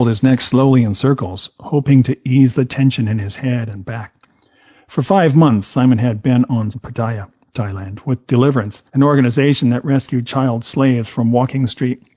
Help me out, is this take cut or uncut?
cut